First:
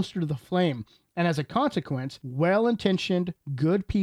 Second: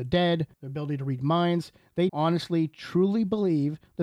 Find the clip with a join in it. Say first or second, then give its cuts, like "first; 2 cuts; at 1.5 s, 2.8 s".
second; 1 cut; at 2.1 s